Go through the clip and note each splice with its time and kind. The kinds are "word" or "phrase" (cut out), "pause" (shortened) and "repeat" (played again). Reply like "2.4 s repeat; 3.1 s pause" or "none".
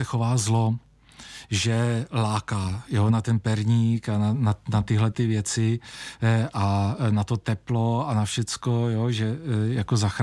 none